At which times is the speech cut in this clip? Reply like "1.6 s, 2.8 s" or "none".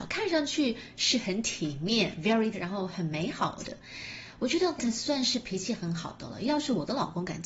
2.5 s, 4.8 s